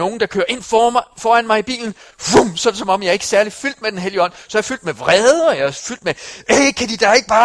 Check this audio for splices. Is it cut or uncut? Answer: uncut